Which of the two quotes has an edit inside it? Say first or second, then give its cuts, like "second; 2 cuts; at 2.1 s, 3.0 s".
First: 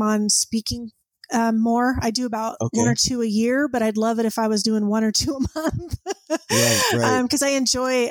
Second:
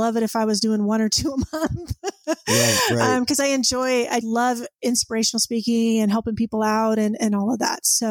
second; 1 cut; at 4.2 s